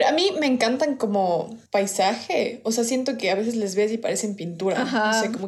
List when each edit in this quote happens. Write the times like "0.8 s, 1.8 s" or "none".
1.7 s

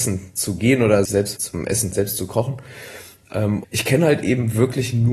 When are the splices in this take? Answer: 1.1 s, 1.4 s, 1.9 s, 3.6 s

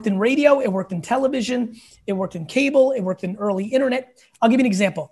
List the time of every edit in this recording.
none

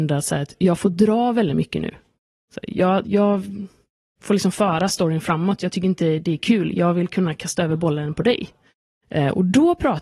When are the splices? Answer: 3.0 s

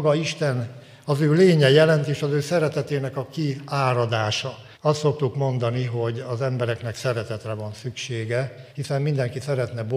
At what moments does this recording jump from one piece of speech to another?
4.7 s, 8.7 s

